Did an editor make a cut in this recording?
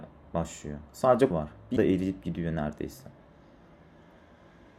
yes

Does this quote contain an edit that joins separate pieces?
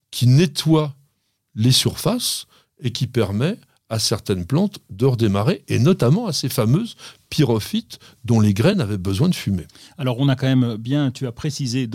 no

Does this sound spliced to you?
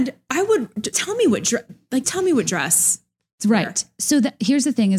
yes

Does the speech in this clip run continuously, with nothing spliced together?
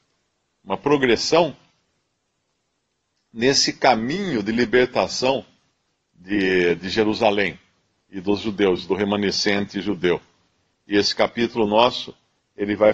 yes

